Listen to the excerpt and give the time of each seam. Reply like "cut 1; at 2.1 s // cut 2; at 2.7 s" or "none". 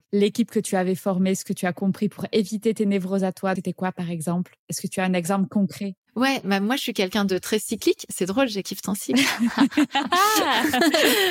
cut 1; at 3.6 s // cut 2; at 8.6 s